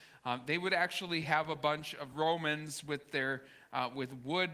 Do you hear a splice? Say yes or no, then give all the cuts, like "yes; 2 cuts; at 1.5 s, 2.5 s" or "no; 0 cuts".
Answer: no; 0 cuts